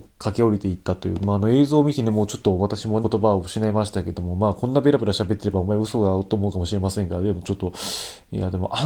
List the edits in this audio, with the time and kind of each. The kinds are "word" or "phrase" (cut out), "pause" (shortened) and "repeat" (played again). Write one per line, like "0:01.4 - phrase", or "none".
0:03.0 - word